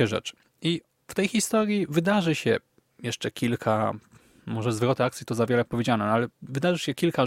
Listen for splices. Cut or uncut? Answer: uncut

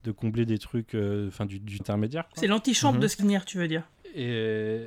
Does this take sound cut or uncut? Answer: cut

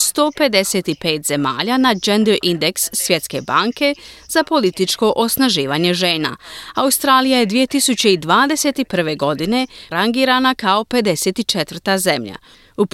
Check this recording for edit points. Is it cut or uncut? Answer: cut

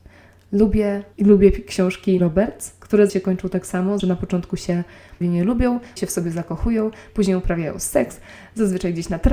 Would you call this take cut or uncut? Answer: cut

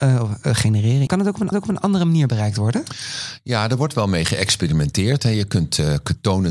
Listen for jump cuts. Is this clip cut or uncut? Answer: cut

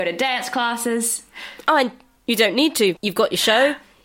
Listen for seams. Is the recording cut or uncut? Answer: cut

